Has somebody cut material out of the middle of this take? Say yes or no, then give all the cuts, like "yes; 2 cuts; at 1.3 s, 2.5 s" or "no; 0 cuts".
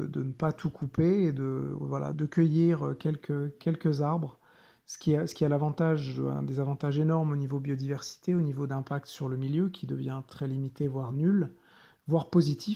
yes; 3 cuts; at 2.1 s, 3.6 s, 10.3 s